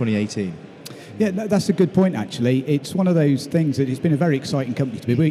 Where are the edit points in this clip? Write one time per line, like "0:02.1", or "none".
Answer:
none